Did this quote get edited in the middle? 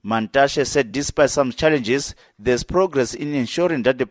no; 0 cuts

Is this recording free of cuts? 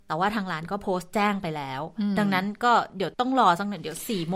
no; 1 cut; at 3.1 s

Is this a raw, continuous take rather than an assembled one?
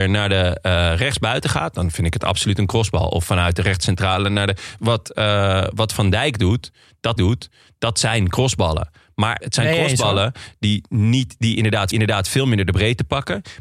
no; 4 cuts; at 4.8 s, 7.2 s, 9.4 s, 11.9 s

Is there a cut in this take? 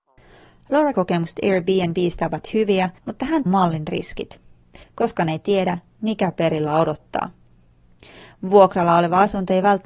yes; 4 cuts; at 0.9 s, 3.0 s, 3.5 s, 4.8 s

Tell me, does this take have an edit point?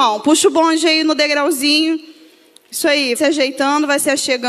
yes; 1 cut; at 3.1 s

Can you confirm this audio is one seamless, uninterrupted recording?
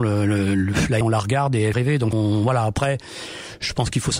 no; 3 cuts; at 1.0 s, 1.7 s, 2.1 s

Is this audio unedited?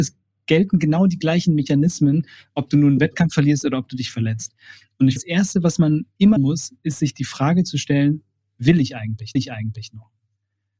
no; 3 cuts; at 5.2 s, 6.4 s, 9.3 s

